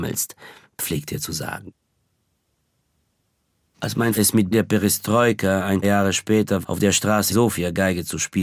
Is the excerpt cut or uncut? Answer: cut